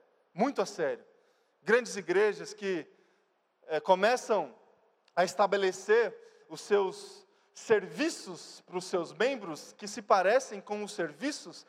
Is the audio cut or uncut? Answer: uncut